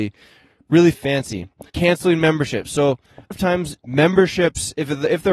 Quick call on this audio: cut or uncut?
cut